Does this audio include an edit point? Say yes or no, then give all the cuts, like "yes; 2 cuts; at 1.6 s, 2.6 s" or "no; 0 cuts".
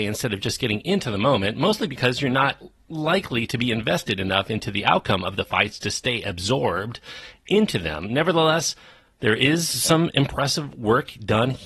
no; 0 cuts